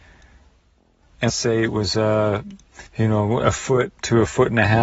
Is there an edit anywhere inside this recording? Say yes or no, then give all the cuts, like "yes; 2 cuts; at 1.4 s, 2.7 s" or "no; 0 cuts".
yes; 2 cuts; at 1.3 s, 2.9 s